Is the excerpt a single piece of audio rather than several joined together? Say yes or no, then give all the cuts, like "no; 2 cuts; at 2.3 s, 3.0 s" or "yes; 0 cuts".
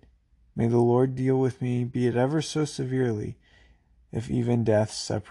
yes; 0 cuts